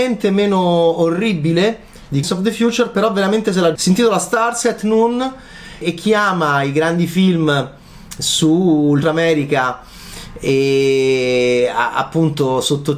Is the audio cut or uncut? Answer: cut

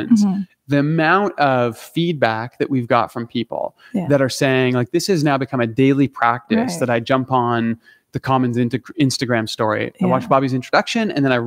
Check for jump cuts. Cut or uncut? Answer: uncut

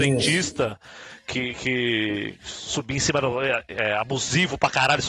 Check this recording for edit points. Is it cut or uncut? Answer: uncut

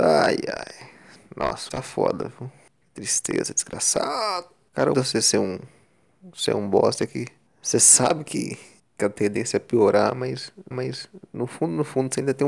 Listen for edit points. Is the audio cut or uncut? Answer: cut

